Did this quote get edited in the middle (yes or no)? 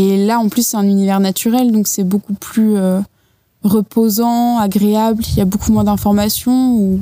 no